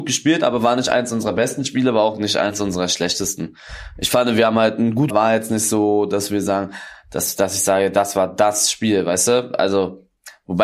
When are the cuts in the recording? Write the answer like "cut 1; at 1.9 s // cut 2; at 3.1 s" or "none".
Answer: cut 1; at 5.1 s